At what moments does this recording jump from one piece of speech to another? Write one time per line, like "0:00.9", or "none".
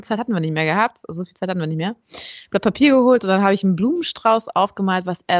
none